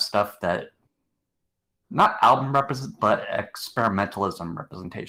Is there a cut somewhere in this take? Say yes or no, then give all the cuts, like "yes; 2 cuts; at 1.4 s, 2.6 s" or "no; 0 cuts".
yes; 1 cut; at 3.0 s